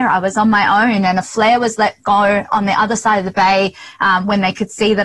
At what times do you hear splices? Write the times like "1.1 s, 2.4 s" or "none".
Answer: none